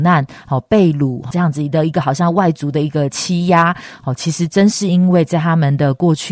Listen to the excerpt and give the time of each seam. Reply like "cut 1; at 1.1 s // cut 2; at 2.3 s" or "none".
cut 1; at 1.3 s